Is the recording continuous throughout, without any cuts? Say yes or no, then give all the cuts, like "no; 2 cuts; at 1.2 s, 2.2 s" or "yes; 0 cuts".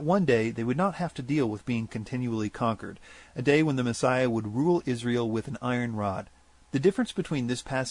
yes; 0 cuts